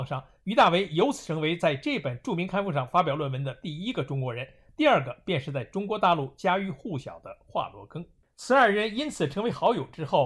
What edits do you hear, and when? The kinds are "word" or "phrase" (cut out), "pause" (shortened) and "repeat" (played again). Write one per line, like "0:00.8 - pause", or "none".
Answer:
none